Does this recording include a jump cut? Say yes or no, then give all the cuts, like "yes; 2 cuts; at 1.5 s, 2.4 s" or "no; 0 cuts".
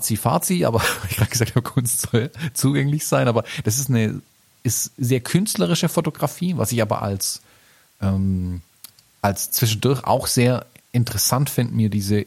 no; 0 cuts